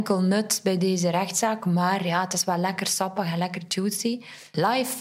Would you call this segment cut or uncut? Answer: uncut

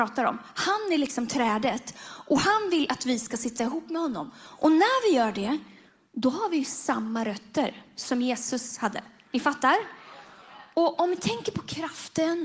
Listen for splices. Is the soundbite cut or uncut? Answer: uncut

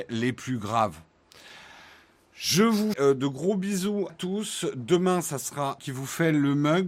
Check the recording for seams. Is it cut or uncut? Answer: cut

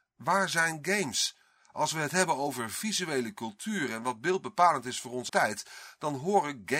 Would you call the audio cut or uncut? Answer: cut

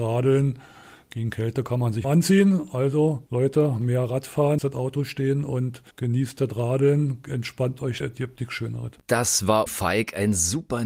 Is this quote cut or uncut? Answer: cut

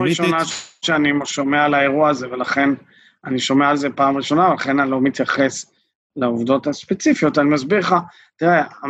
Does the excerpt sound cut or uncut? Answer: uncut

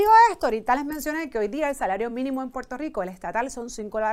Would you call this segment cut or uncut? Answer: uncut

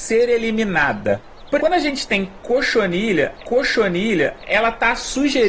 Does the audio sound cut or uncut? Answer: cut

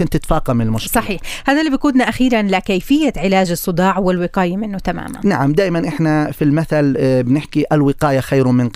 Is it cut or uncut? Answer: uncut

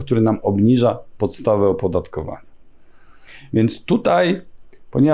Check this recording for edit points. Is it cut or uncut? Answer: uncut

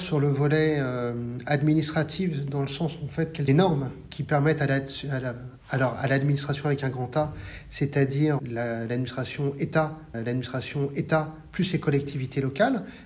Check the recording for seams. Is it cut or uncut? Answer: cut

